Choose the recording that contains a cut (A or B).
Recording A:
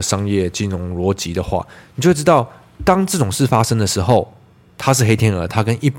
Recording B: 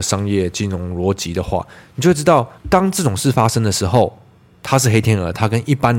B